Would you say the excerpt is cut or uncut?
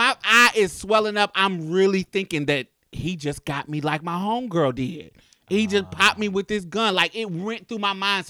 uncut